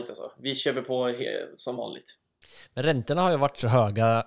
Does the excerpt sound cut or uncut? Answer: uncut